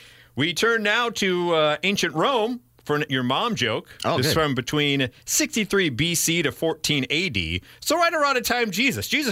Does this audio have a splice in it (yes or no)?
yes